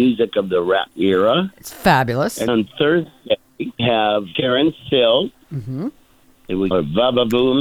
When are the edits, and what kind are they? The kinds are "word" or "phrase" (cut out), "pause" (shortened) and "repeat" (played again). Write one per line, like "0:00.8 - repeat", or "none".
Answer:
0:00.9 - word
0:02.5 - word
0:03.8 - word
0:04.3 - word
0:06.7 - word